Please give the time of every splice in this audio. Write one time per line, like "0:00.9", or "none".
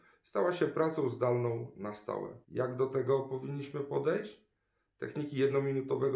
0:02.4